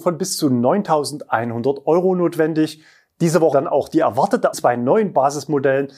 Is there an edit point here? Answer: yes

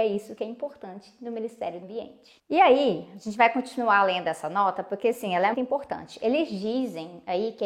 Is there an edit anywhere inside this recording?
yes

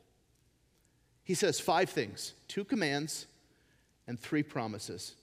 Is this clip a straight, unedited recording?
yes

